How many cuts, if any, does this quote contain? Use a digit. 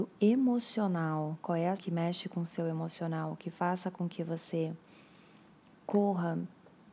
1